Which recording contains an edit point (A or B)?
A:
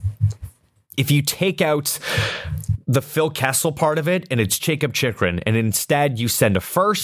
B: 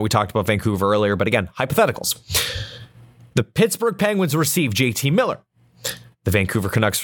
A